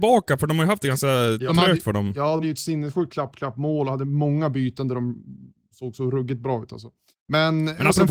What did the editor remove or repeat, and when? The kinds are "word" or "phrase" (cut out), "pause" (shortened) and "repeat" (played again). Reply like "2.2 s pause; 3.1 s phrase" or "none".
1.5 s word; 2.4 s word; 5.7 s word; 7.1 s pause